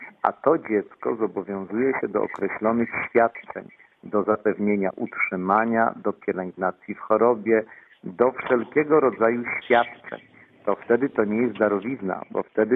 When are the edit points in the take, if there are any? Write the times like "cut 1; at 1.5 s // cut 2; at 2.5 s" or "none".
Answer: none